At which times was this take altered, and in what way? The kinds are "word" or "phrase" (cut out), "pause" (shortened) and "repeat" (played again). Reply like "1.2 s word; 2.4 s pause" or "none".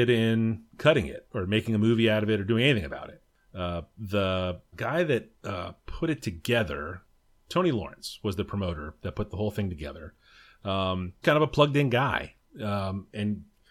4.7 s word; 11.2 s word